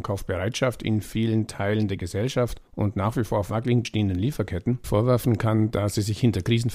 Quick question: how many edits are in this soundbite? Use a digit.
3